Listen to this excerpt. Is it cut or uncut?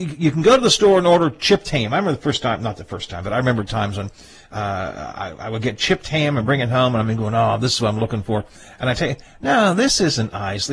uncut